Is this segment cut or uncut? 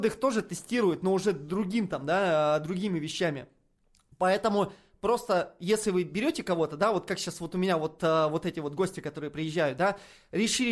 uncut